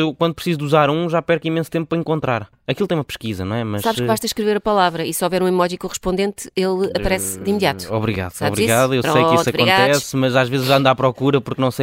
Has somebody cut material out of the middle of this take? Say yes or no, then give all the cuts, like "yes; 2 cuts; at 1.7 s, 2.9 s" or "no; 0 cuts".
no; 0 cuts